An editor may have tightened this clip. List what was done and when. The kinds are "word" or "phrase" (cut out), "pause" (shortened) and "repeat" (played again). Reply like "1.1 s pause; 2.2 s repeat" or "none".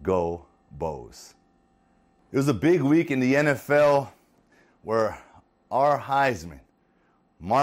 none